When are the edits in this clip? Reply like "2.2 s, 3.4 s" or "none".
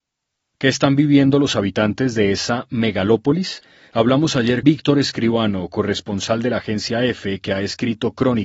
4.6 s